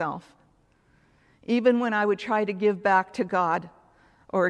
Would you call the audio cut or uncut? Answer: uncut